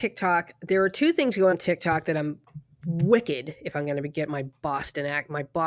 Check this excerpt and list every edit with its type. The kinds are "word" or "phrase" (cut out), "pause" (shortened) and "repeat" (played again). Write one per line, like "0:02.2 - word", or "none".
0:01.5 - word